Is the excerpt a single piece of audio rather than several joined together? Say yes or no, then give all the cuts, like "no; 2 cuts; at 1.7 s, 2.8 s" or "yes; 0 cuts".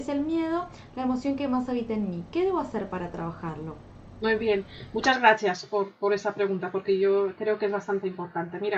yes; 0 cuts